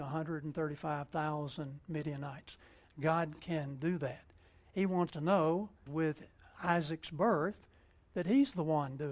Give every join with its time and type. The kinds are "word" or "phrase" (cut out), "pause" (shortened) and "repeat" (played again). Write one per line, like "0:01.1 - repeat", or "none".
0:05.1 - word
0:05.9 - word